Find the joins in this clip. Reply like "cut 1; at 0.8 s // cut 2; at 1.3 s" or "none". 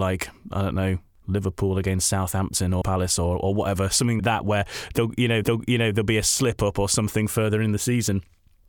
cut 1; at 2.8 s // cut 2; at 4.2 s // cut 3; at 5.4 s